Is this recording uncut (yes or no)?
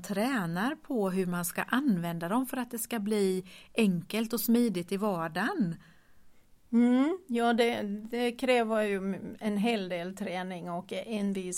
yes